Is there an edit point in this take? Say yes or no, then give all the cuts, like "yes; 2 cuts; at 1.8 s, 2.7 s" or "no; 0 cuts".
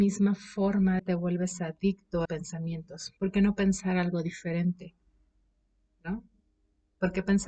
yes; 3 cuts; at 1.0 s, 2.2 s, 3.2 s